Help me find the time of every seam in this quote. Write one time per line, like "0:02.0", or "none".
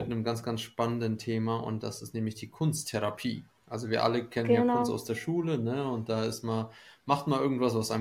0:03.6